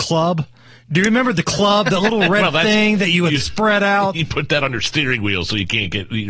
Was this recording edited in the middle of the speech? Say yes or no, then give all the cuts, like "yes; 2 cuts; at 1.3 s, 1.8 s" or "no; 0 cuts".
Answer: no; 0 cuts